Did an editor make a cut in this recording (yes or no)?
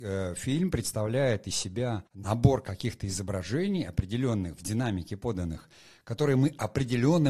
yes